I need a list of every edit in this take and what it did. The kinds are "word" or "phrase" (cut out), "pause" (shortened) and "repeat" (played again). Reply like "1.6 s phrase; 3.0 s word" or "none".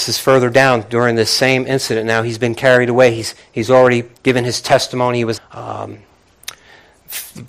4.1 s word; 5.4 s phrase